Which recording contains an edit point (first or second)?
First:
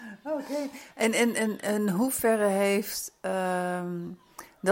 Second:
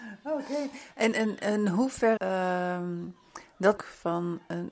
second